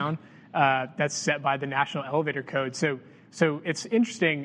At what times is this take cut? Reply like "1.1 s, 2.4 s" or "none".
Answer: none